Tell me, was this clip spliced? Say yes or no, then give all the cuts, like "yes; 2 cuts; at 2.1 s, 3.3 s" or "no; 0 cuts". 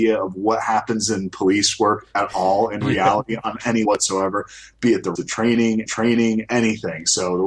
yes; 3 cuts; at 3.9 s, 5.2 s, 5.9 s